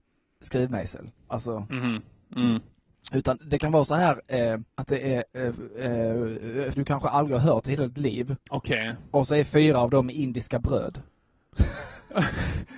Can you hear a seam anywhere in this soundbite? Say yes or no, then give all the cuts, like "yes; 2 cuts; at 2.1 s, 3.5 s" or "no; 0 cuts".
yes; 3 cuts; at 4.7 s, 6.7 s, 8.4 s